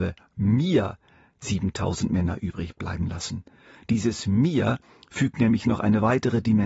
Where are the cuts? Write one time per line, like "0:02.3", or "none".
none